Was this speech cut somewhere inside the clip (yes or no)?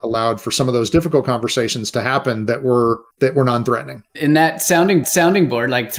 yes